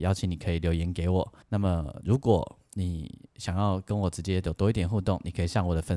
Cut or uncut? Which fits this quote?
cut